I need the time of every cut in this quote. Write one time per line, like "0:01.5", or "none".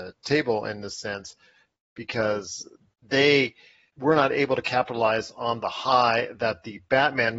none